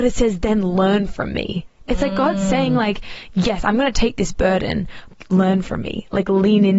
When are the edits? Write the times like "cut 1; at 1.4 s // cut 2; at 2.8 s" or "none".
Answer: none